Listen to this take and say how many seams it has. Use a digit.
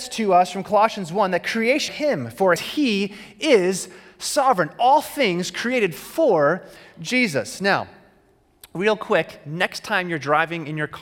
2